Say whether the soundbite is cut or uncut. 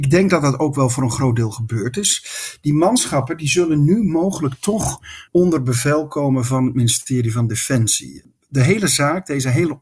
cut